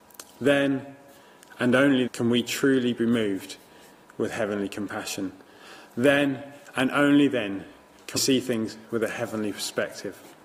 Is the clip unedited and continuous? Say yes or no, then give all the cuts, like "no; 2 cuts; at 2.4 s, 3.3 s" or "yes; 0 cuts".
no; 2 cuts; at 2.1 s, 8.2 s